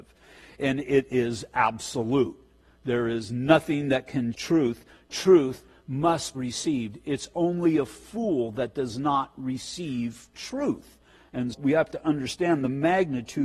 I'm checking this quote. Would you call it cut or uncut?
cut